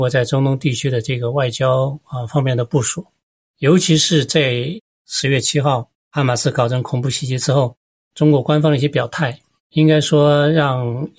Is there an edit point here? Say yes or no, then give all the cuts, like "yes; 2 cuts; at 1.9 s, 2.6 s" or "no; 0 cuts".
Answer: no; 0 cuts